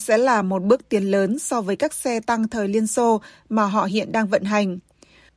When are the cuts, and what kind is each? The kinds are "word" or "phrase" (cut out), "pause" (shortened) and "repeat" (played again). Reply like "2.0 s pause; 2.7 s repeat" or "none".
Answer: none